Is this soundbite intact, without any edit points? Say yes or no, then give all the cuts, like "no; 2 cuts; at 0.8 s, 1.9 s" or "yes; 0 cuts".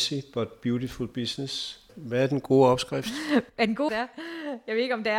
no; 2 cuts; at 1.9 s, 3.9 s